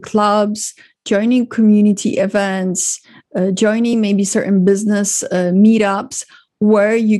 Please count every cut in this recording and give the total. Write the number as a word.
zero